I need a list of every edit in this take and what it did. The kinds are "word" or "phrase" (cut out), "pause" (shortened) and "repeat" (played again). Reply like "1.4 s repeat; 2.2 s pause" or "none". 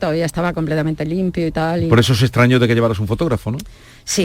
none